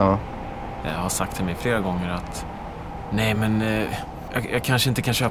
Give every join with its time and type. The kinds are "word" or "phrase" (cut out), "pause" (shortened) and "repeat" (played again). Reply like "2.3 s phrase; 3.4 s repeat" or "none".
none